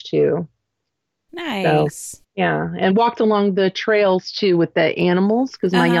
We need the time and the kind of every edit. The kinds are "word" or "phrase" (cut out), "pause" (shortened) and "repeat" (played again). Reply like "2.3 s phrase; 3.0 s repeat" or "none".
2.9 s word